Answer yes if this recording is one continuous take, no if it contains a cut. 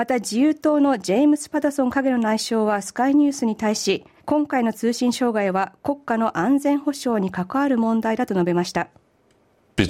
no